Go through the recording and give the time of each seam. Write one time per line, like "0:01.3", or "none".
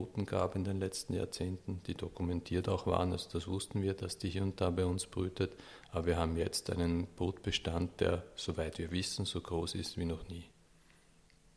none